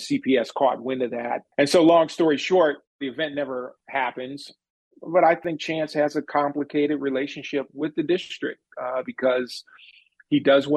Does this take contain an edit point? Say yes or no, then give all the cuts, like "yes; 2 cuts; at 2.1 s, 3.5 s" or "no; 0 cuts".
no; 0 cuts